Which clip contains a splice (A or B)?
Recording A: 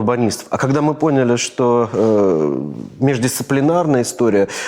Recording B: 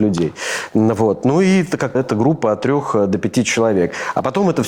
B